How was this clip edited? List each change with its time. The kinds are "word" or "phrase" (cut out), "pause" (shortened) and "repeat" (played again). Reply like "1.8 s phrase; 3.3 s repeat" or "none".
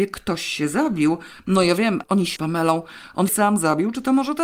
2.0 s word; 2.4 s phrase; 3.3 s word